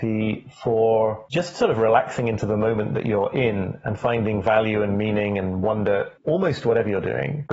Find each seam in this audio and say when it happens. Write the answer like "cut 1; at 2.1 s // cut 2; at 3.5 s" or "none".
none

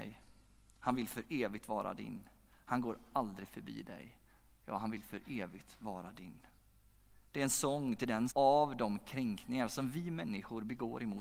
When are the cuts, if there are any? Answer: cut 1; at 8.3 s

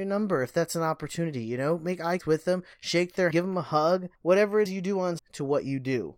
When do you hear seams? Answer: cut 1; at 2.2 s // cut 2; at 2.7 s // cut 3; at 3.3 s // cut 4; at 4.1 s // cut 5; at 4.7 s // cut 6; at 5.2 s

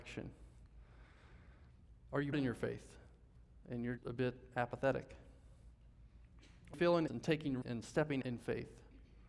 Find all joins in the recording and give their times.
cut 1; at 2.3 s // cut 2; at 4.0 s // cut 3; at 6.7 s // cut 4; at 7.1 s // cut 5; at 7.6 s // cut 6; at 8.2 s

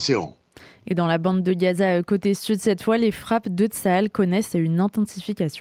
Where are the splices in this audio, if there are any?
none

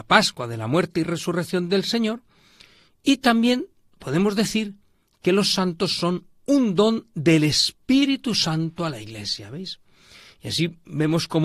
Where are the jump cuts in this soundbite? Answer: none

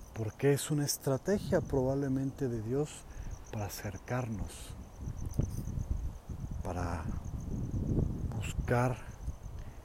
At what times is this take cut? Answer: none

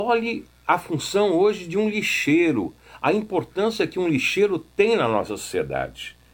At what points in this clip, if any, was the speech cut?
none

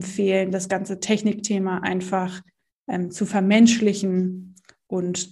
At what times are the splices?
none

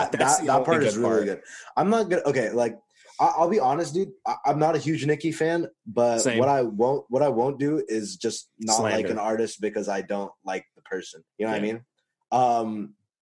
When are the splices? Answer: cut 1; at 11.3 s

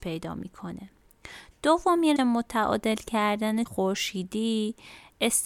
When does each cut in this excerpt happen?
cut 1; at 2.2 s // cut 2; at 3.7 s

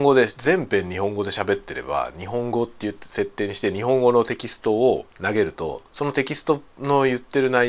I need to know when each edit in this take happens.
cut 1; at 5.1 s // cut 2; at 5.9 s

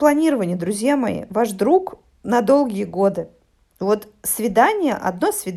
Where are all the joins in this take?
none

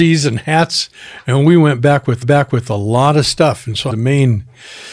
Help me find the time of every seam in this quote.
cut 1; at 2.2 s // cut 2; at 3.9 s

